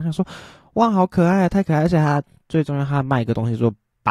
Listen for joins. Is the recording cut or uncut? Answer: uncut